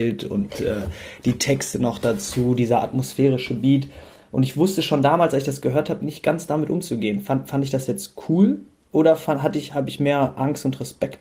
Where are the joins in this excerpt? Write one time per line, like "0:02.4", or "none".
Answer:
none